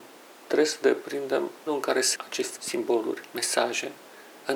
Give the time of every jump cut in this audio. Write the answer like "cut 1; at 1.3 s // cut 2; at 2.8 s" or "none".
cut 1; at 1.7 s // cut 2; at 2.2 s // cut 3; at 2.6 s